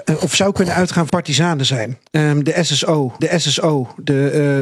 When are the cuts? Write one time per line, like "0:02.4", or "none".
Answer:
0:01.1
0:02.1
0:03.2